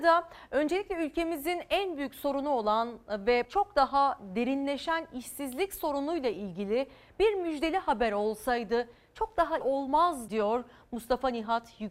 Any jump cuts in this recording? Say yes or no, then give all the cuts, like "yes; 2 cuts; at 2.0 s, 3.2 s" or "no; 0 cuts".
yes; 3 cuts; at 3.4 s, 9.6 s, 10.3 s